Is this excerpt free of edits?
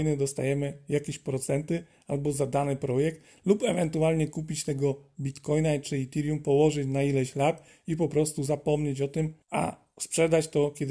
no; 1 cut; at 9.4 s

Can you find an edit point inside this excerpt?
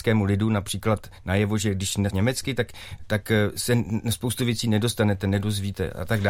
yes; 1 cut; at 2.1 s

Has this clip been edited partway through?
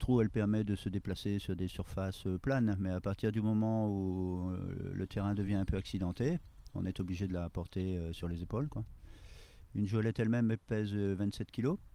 no; 0 cuts

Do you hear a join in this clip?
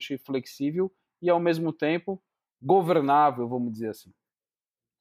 no; 0 cuts

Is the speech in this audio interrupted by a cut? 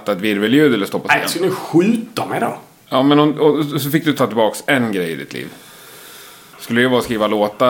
no; 0 cuts

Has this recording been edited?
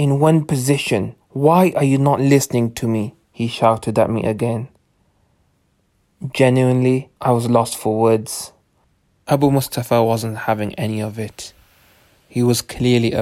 yes; 3 cuts; at 1.2 s, 3.2 s, 7.2 s

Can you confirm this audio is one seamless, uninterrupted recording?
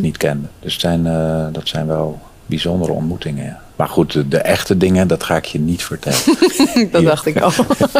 yes; 0 cuts

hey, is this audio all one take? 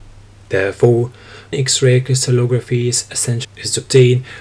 no; 2 cuts; at 1.5 s, 3.4 s

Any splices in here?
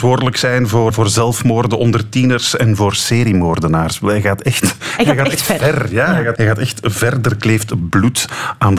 yes; 2 cuts; at 0.9 s, 6.4 s

